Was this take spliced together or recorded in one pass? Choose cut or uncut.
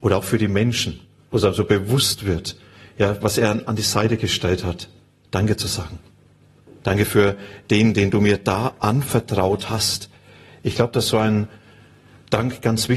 uncut